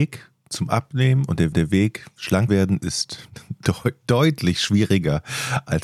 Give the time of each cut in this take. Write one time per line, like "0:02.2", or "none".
0:01.5
0:02.5